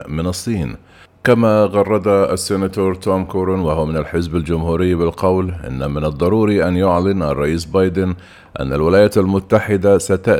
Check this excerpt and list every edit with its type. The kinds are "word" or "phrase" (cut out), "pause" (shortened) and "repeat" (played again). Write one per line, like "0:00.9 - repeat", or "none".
none